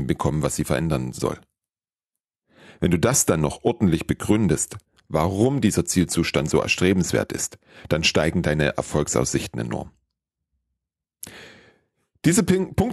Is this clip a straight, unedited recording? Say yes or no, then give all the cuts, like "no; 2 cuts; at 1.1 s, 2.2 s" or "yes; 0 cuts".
yes; 0 cuts